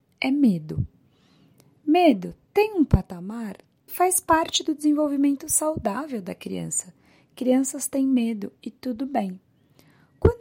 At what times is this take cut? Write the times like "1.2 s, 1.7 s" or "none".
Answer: 3.9 s